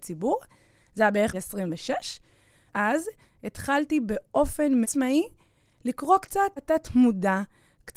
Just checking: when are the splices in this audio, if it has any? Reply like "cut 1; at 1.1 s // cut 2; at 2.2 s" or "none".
cut 1; at 1.3 s // cut 2; at 2.7 s // cut 3; at 4.8 s // cut 4; at 6.6 s